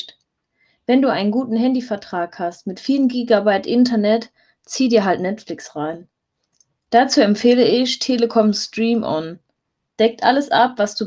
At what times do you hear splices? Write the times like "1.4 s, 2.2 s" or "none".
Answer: none